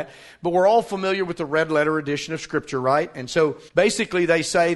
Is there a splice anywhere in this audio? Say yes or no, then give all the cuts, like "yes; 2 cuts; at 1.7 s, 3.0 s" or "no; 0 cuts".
yes; 1 cut; at 3.7 s